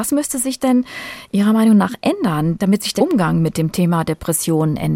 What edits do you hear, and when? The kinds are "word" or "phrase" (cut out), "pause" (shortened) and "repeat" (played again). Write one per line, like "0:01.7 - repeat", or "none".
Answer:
0:03.0 - word